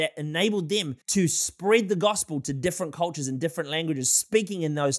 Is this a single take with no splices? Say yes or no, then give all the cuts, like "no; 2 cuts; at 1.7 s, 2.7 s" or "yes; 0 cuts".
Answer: no; 1 cut; at 1.0 s